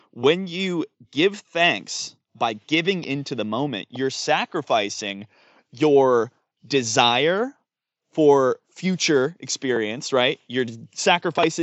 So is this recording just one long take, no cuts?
yes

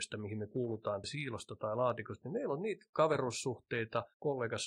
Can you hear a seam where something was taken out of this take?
yes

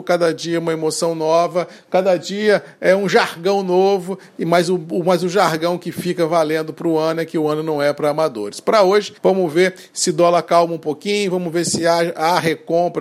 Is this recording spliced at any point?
yes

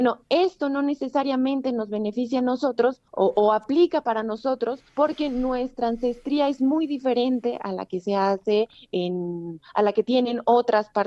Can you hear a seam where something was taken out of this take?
yes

